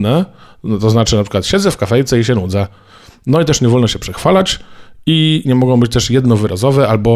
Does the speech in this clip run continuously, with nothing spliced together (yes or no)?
yes